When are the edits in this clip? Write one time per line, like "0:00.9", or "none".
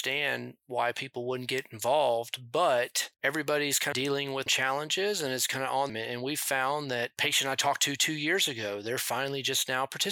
0:03.9
0:04.5
0:05.9